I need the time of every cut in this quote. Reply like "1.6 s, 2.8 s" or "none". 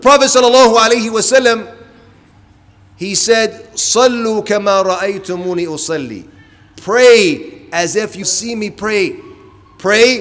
8.2 s